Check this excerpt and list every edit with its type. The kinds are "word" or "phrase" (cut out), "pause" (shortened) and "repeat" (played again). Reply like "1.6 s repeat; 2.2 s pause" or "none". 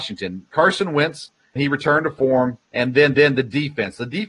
1.6 s word; 2.6 s pause; 3.1 s repeat